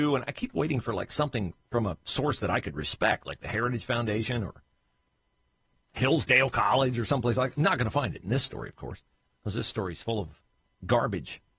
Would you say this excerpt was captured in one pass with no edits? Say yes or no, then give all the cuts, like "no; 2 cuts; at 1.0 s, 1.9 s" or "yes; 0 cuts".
yes; 0 cuts